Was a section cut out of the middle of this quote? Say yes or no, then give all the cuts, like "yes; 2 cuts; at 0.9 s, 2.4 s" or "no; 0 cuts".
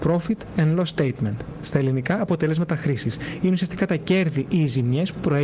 no; 0 cuts